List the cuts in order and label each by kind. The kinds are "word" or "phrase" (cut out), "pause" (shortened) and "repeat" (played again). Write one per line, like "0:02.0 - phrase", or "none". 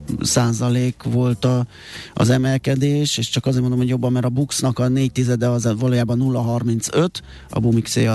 none